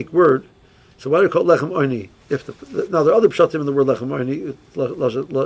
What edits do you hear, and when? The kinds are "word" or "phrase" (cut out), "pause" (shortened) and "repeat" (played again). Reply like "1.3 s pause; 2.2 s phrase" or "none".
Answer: 2.2 s pause